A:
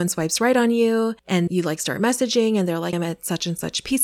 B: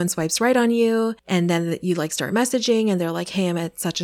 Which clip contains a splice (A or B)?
A